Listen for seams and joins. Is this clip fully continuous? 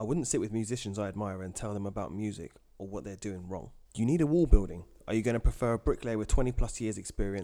no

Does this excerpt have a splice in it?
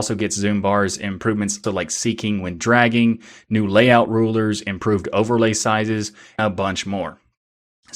yes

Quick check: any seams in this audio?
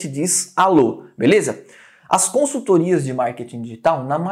no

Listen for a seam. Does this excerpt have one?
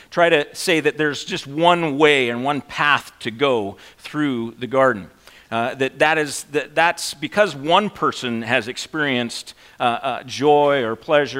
no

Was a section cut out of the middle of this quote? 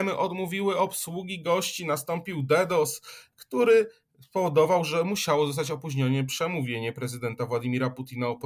no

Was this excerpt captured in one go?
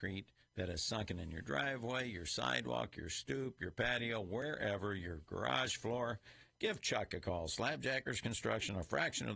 yes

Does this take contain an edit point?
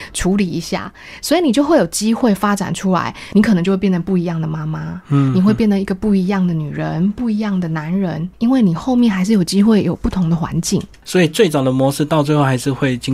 no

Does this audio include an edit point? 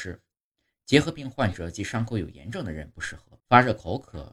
yes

